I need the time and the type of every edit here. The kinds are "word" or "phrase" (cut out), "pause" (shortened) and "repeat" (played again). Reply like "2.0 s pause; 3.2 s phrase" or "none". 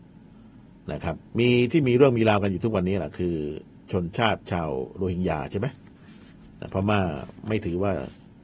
1.3 s pause